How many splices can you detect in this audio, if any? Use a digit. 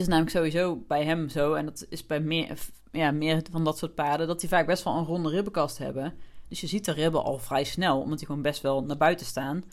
0